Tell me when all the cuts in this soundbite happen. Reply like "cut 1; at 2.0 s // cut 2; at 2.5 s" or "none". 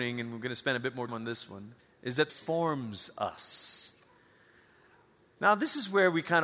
cut 1; at 1.1 s // cut 2; at 1.8 s // cut 3; at 2.3 s